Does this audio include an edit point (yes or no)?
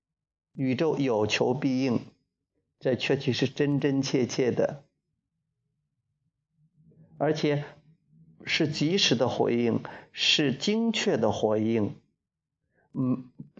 no